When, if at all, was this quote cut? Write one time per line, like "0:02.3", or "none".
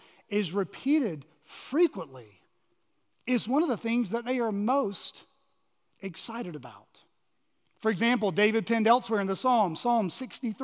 none